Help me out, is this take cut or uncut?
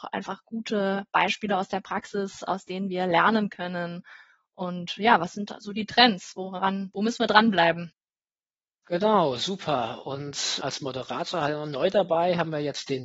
uncut